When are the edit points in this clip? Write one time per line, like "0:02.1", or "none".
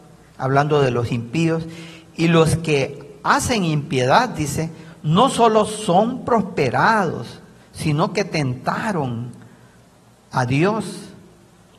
none